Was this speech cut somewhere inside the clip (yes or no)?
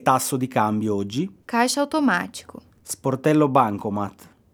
yes